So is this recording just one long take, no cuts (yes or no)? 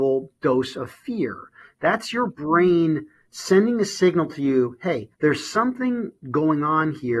no